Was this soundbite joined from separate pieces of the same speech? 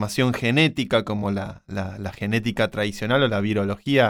no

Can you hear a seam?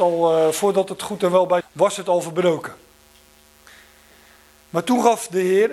yes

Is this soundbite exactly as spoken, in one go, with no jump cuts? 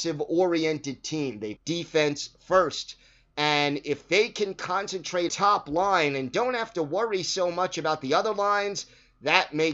no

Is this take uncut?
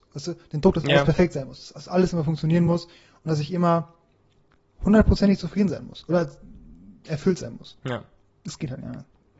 yes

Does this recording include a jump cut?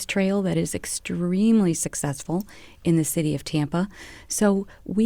no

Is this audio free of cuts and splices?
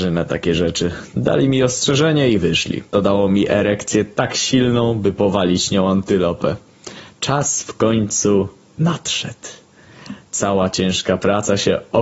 no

